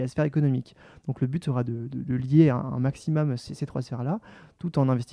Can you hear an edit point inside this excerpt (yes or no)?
no